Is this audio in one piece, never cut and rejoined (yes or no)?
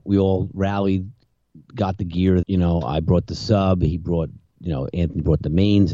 no